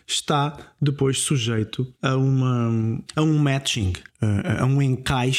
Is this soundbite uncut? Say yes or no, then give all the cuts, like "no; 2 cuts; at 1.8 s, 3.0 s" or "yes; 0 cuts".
no; 3 cuts; at 2.0 s, 3.1 s, 4.1 s